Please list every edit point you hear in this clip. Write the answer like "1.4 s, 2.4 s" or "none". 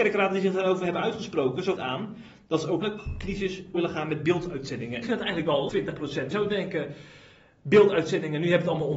1.8 s, 2.8 s, 3.7 s, 5.0 s, 5.7 s, 6.3 s